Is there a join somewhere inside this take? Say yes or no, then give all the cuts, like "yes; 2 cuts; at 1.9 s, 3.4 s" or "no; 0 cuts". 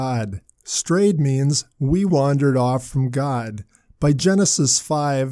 no; 0 cuts